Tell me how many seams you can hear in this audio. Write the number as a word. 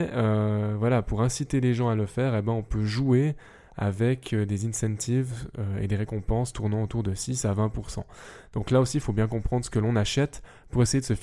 zero